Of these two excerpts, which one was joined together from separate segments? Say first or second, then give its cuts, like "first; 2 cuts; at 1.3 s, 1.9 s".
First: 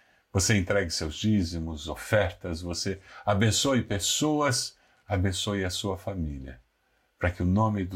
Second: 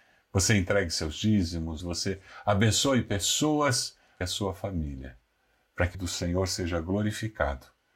second; 3 cuts; at 1.8 s, 4.2 s, 5.9 s